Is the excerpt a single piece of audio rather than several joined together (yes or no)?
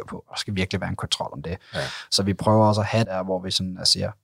no